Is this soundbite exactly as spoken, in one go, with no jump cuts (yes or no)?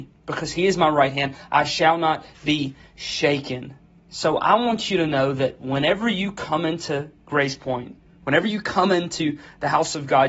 yes